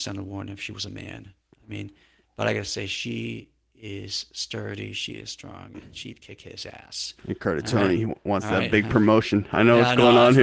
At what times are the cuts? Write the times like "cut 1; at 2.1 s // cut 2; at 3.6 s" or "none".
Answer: none